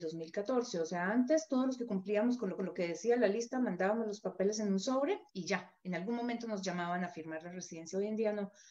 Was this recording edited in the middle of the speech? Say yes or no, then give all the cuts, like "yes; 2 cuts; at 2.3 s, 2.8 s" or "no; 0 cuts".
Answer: yes; 2 cuts; at 2.6 s, 5.3 s